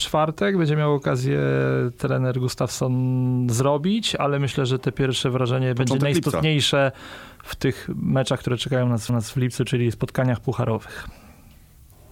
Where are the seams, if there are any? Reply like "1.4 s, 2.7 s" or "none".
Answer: 9.1 s